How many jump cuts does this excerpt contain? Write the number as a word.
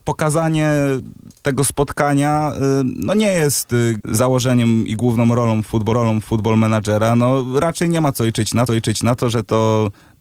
three